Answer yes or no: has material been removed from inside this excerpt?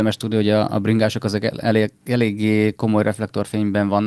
no